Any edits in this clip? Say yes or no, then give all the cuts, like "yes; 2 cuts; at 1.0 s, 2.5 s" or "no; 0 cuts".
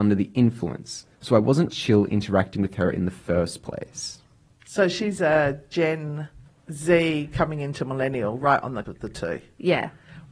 yes; 5 cuts; at 1.1 s, 1.7 s, 4.5 s, 6.5 s, 8.8 s